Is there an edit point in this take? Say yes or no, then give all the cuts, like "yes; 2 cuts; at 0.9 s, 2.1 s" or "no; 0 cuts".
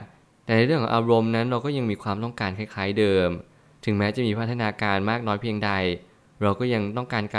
no; 0 cuts